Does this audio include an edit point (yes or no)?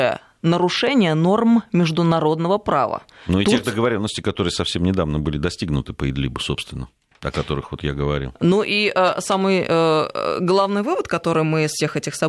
no